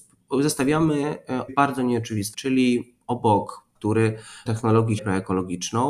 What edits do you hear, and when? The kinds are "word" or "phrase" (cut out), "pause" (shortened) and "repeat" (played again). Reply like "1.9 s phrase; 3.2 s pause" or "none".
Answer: 1.5 s phrase; 2.3 s word; 3.8 s word; 4.5 s word; 5.0 s word